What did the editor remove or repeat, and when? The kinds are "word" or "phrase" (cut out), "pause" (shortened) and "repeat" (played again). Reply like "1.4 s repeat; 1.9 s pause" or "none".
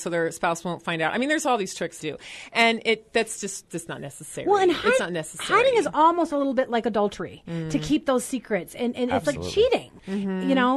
2.0 s phrase; 3.7 s word; 5.0 s word